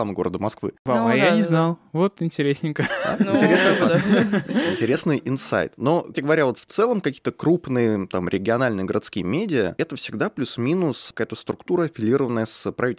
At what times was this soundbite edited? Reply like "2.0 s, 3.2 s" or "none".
6.1 s